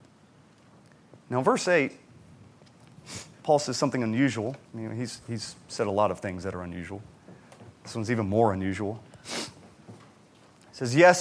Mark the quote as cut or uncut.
cut